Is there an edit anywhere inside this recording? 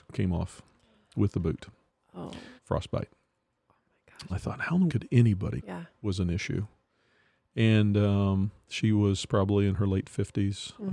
yes; 4 cuts; at 2.6 s, 4.3 s, 4.9 s, 5.6 s

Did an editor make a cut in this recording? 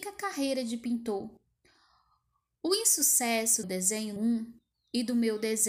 yes; 2 cuts; at 3.6 s, 4.2 s

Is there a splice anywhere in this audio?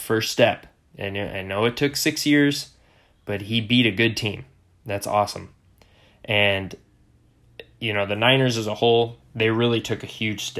no; 0 cuts

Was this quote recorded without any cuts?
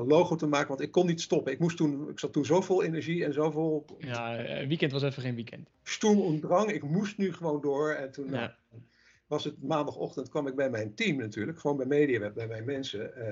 yes; 0 cuts

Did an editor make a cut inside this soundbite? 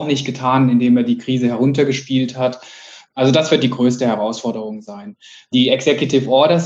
no; 0 cuts

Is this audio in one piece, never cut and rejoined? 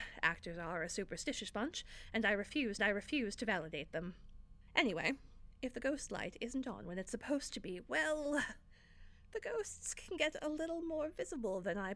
no; 1 cut; at 2.8 s

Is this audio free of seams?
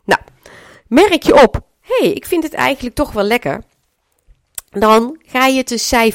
yes; 0 cuts

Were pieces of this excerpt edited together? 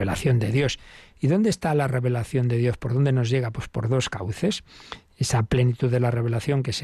no; 0 cuts

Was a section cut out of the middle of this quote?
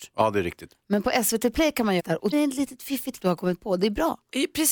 yes; 3 cuts; at 2.0 s, 2.3 s, 3.2 s

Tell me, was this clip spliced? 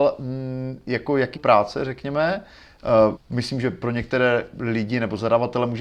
yes; 2 cuts; at 1.3 s, 3.1 s

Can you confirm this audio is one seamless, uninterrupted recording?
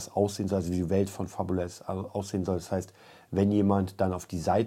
yes; 0 cuts

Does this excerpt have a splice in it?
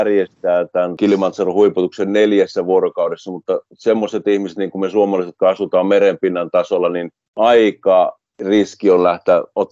no; 0 cuts

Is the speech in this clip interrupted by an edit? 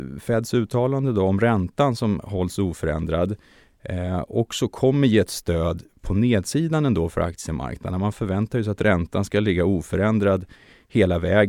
no; 0 cuts

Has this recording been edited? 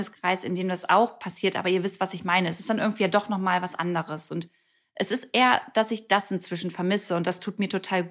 no; 0 cuts

